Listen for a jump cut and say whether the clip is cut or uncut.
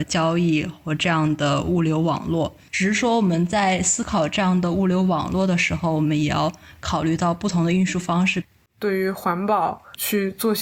uncut